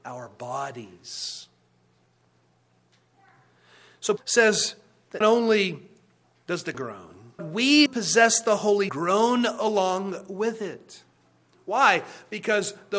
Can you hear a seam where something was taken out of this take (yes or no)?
yes